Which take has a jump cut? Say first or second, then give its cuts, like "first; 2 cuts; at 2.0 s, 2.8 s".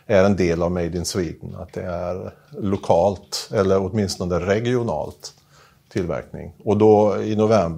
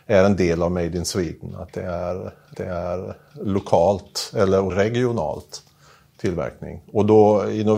second; 2 cuts; at 2.5 s, 4.7 s